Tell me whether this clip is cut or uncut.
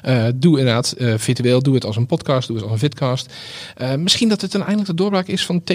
uncut